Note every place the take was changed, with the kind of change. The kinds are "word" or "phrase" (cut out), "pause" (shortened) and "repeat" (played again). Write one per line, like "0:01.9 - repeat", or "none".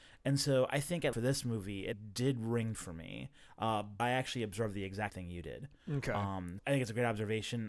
0:01.1 - word
0:01.9 - word
0:02.7 - word
0:04.0 - word
0:05.1 - word
0:06.6 - word